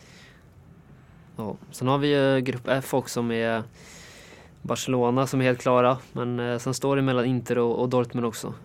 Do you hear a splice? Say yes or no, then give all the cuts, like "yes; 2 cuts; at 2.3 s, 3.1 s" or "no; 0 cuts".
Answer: no; 0 cuts